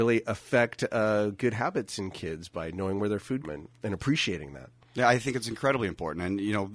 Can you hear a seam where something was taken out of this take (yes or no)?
yes